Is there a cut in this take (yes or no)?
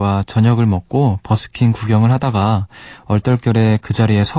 no